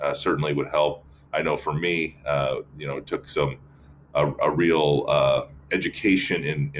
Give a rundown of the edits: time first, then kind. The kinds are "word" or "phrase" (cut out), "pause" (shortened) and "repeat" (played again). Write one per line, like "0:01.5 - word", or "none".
none